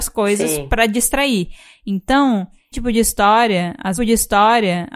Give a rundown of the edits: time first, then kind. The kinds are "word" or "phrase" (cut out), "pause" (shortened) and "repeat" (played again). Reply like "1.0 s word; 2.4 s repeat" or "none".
2.7 s word; 4.0 s repeat